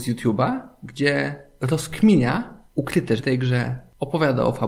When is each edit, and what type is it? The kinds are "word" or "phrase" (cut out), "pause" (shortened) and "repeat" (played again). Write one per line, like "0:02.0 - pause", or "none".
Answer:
0:01.6 - word
0:03.2 - word